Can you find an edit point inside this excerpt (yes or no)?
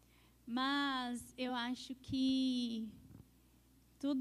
no